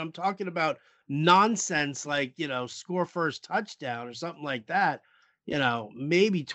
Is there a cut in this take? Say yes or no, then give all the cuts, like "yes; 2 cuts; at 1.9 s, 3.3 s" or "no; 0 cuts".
no; 0 cuts